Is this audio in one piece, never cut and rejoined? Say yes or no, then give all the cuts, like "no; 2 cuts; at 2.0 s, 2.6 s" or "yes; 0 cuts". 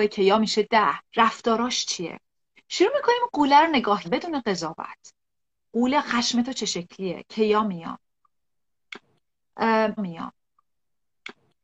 no; 3 cuts; at 1.1 s, 4.0 s, 10.0 s